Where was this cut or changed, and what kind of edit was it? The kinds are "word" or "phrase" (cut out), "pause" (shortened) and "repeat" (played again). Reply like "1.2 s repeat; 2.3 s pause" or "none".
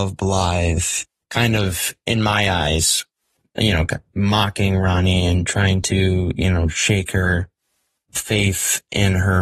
4.1 s word